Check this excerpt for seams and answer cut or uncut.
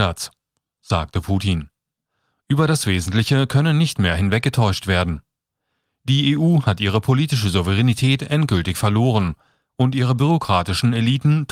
uncut